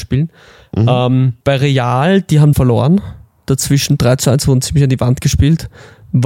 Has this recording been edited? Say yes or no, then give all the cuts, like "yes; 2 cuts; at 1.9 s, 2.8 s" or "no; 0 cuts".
yes; 2 cuts; at 1.4 s, 2.5 s